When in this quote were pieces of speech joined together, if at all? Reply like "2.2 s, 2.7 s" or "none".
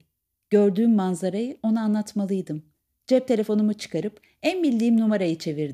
2.7 s

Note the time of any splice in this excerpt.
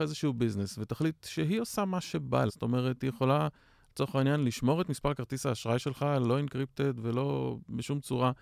2.5 s

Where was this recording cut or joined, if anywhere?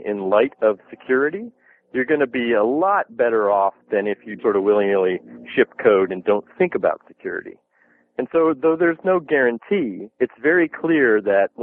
4.4 s, 10.1 s

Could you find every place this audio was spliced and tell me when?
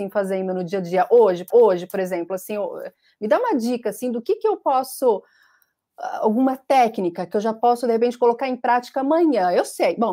1.5 s

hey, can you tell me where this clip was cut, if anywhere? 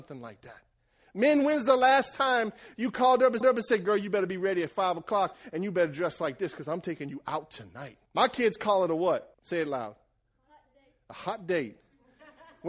3.4 s, 8.1 s, 9.3 s

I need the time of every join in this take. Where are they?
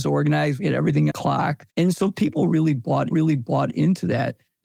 1.1 s, 1.7 s, 3.1 s

